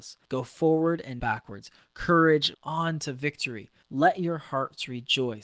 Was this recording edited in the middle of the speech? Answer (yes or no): yes